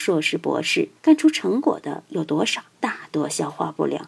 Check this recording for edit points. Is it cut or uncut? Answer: cut